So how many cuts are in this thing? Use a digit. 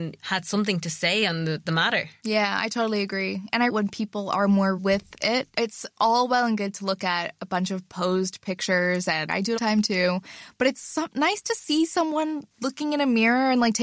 4